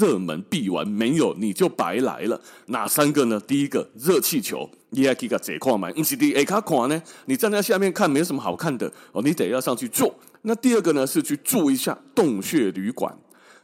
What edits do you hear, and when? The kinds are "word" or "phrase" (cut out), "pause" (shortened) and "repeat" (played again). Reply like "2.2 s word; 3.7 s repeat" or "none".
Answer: 4.8 s pause; 10.2 s pause

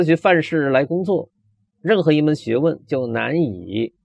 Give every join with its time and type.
none

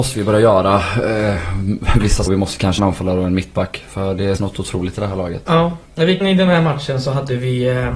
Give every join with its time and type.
2.3 s phrase; 2.8 s phrase; 4.4 s word; 5.9 s pause; 6.2 s word

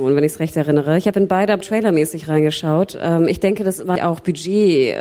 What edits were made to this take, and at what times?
1.6 s word; 4.0 s word

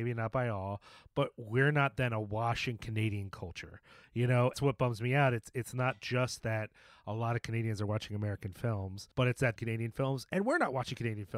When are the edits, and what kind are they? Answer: 4.5 s phrase; 9.1 s pause; 9.6 s phrase

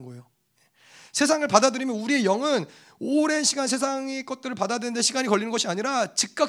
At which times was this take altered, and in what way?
none

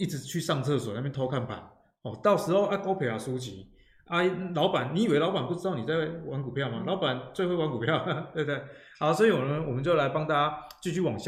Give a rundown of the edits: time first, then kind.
none

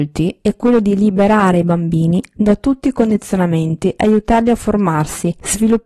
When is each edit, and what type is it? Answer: none

